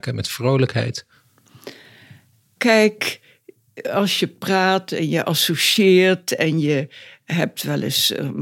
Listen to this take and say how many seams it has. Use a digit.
0